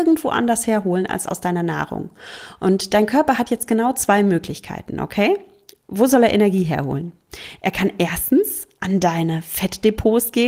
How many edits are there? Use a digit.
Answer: 0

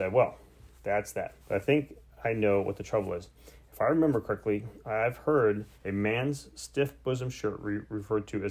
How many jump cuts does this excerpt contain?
2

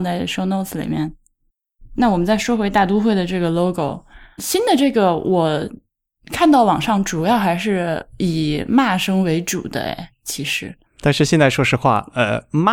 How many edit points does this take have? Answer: 2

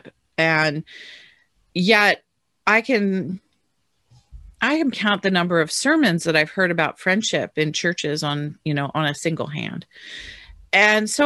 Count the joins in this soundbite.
1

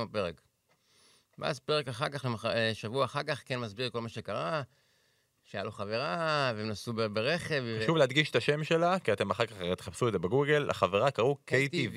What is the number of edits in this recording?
0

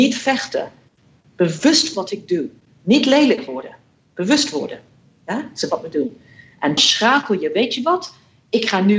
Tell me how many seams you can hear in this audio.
3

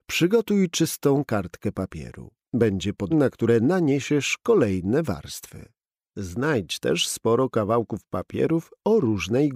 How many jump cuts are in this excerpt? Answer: 1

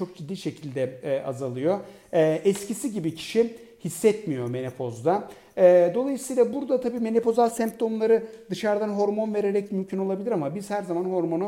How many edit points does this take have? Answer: 1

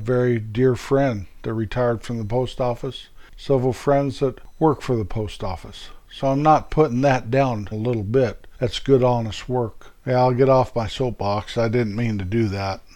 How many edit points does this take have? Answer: 3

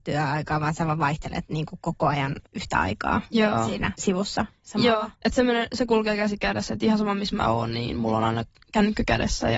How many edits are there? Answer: 4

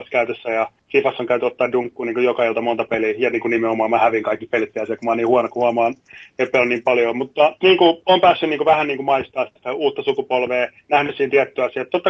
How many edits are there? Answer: 2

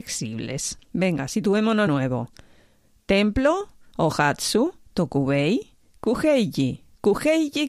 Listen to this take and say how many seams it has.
1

